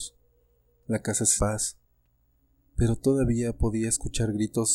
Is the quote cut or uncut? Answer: cut